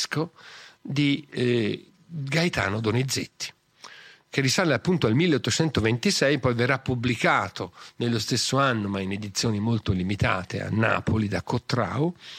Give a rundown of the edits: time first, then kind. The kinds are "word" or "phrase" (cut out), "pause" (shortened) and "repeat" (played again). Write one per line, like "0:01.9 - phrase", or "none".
none